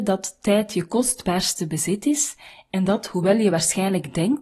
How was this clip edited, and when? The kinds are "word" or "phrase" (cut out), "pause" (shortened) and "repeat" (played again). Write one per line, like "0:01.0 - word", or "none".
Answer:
none